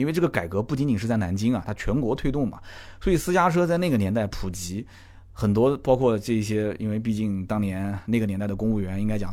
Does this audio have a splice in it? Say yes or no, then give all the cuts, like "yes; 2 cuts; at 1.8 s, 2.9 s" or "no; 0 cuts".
no; 0 cuts